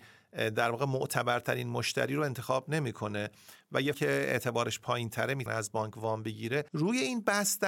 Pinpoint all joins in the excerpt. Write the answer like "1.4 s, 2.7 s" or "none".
3.9 s, 5.5 s, 6.7 s